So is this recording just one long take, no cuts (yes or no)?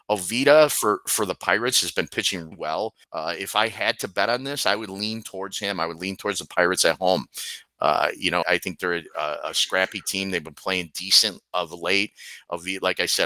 no